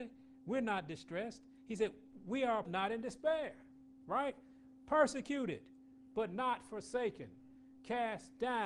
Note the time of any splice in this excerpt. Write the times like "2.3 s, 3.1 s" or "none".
2.6 s